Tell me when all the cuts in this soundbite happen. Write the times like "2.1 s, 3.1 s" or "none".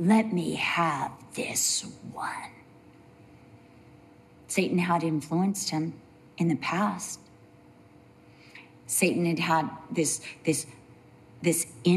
none